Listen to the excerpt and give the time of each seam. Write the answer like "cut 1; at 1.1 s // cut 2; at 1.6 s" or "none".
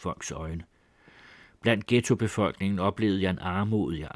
none

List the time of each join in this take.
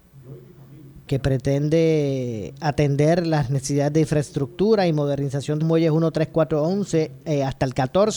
cut 1; at 1.1 s // cut 2; at 5.6 s

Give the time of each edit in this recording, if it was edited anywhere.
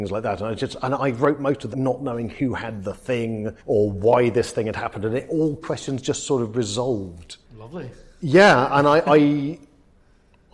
cut 1; at 1.7 s // cut 2; at 3.6 s // cut 3; at 5.6 s // cut 4; at 7.4 s

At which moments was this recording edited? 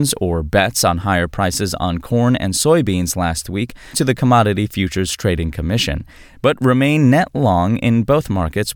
cut 1; at 3.9 s

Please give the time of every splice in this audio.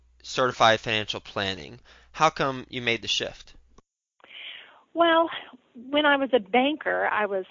none

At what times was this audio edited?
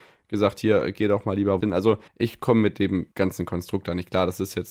cut 1; at 1.6 s // cut 2; at 2.1 s // cut 3; at 3.1 s

